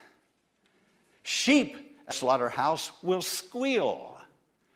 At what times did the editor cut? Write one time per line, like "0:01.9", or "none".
0:02.1